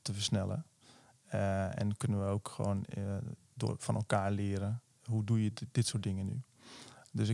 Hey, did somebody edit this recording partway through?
no; 0 cuts

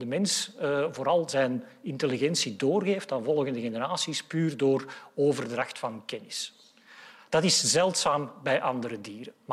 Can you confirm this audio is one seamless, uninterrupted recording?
yes; 0 cuts

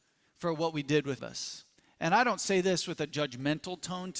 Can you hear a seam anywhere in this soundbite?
yes; 2 cuts; at 1.2 s, 1.8 s

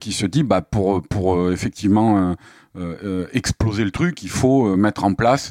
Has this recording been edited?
no; 0 cuts

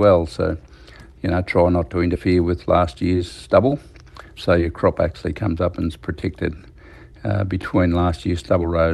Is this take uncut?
yes; 0 cuts

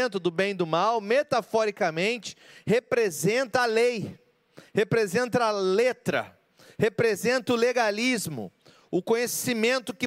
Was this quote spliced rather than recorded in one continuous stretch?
no; 0 cuts

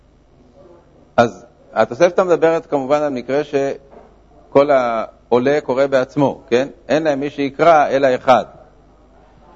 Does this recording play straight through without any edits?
yes; 0 cuts

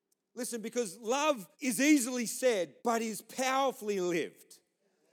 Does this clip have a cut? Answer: yes; 2 cuts; at 1.5 s, 2.8 s

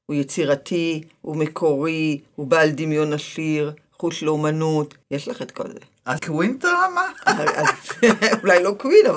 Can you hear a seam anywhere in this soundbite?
yes; 2 cuts; at 5.0 s, 6.2 s

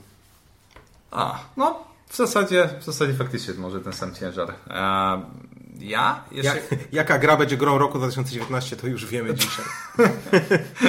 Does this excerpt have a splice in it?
no; 0 cuts

